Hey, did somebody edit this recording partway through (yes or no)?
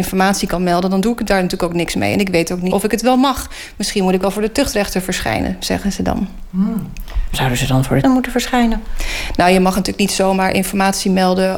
yes